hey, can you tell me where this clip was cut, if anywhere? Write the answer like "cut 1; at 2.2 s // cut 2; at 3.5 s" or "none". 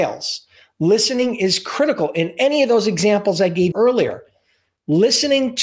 cut 1; at 3.7 s